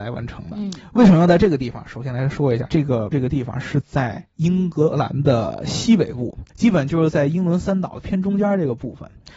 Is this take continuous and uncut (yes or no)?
no